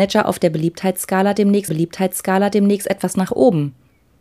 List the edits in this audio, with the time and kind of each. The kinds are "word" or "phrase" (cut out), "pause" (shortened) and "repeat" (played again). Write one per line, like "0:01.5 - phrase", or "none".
0:01.7 - repeat